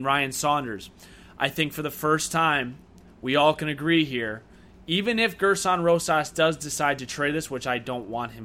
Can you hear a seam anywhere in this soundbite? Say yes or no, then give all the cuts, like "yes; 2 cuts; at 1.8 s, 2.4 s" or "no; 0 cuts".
no; 0 cuts